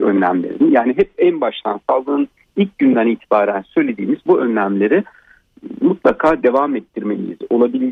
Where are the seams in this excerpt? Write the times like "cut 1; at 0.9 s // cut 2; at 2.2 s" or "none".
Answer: none